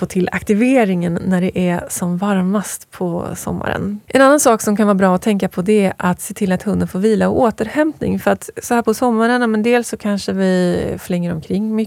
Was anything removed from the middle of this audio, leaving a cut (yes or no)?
yes